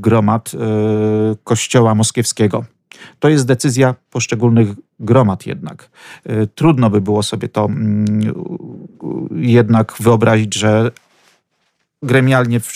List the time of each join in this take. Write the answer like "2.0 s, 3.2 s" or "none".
none